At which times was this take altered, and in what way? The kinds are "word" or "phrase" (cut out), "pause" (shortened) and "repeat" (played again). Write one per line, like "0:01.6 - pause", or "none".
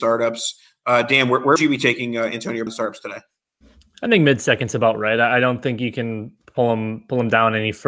0:01.6 - word
0:02.7 - word